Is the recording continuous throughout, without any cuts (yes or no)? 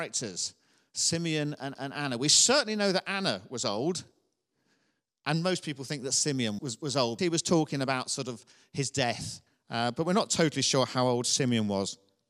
no